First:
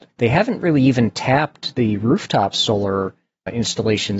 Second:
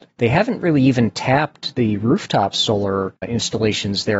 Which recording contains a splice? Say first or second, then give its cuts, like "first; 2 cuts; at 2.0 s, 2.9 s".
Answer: second; 1 cut; at 3.2 s